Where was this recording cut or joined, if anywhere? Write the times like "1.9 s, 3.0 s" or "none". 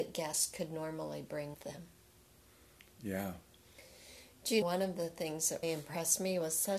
1.5 s, 4.6 s, 5.6 s